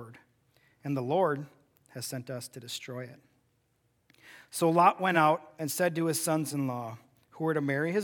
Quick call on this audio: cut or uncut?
uncut